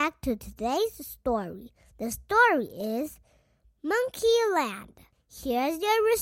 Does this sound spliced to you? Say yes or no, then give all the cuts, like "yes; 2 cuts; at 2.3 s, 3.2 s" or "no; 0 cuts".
no; 0 cuts